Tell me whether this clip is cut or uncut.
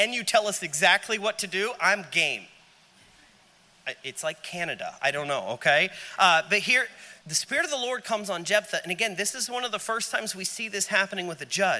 cut